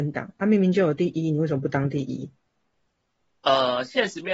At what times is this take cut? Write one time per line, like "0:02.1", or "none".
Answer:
none